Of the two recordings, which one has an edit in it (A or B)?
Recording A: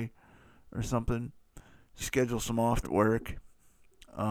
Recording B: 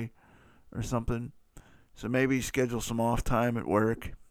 A